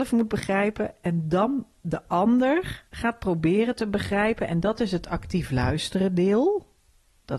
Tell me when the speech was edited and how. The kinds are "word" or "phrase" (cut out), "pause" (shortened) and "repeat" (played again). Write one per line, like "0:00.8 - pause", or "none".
0:02.9 - pause